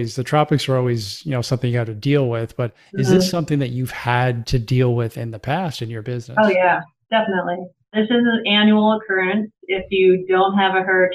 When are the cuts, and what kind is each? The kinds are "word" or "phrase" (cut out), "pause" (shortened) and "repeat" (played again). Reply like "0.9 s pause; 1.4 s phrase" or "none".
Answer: none